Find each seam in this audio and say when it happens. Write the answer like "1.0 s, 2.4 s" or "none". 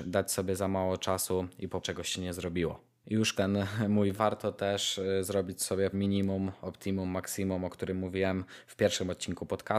1.8 s, 3.3 s, 4.1 s, 5.9 s